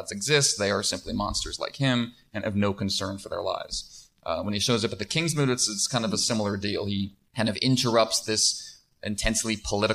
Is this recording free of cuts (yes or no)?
no